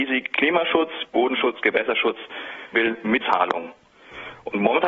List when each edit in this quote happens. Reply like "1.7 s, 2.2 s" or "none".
1.1 s, 2.7 s, 3.2 s

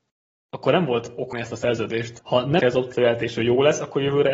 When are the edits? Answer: 1.3 s, 2.2 s, 2.6 s

